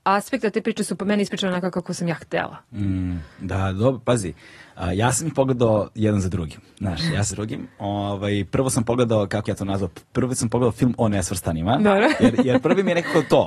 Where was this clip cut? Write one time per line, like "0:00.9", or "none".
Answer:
0:03.3
0:06.7
0:07.3
0:09.5

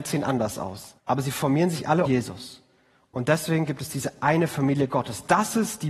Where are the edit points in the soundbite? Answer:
0:01.0
0:02.1

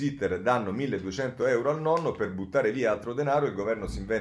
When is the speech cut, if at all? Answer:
none

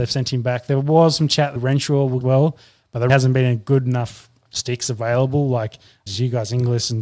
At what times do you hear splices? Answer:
0:01.6
0:02.2
0:03.1
0:04.5
0:06.1

